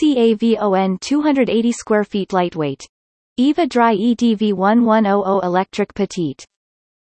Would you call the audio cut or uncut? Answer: cut